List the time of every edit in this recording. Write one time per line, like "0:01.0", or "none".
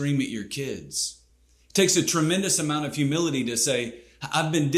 none